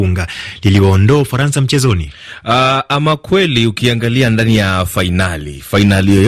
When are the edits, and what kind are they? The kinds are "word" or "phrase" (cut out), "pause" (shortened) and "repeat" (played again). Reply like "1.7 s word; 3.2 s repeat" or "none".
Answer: none